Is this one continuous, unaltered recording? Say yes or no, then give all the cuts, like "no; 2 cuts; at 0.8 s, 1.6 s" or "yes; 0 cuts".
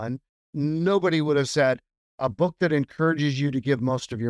yes; 0 cuts